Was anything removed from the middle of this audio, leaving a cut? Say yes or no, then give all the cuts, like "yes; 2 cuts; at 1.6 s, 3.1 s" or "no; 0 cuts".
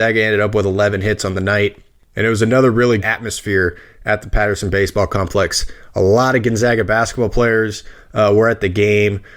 yes; 1 cut; at 3.0 s